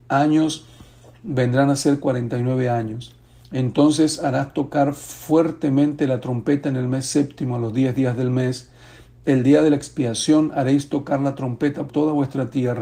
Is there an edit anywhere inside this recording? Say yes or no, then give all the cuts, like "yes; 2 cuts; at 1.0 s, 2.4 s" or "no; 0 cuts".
yes; 1 cut; at 11.9 s